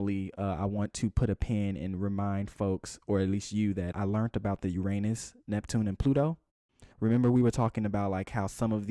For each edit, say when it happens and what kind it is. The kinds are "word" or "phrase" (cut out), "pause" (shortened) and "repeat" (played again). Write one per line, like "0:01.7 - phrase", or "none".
0:03.9 - word
0:06.9 - pause